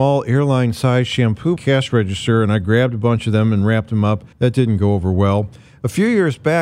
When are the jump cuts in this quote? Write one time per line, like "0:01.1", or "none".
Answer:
0:01.6
0:04.3